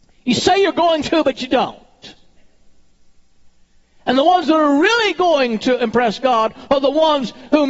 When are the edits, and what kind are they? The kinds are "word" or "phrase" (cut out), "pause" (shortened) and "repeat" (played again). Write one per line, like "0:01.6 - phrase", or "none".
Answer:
none